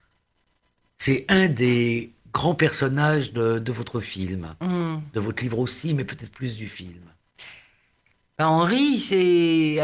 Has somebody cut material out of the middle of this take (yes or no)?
no